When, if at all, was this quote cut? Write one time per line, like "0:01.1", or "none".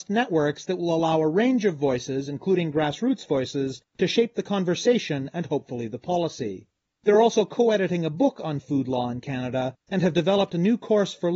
none